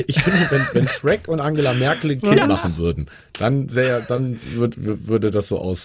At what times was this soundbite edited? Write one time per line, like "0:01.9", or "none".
none